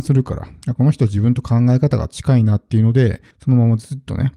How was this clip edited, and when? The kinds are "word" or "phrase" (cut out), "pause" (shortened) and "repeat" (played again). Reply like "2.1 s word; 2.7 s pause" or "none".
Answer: 3.3 s pause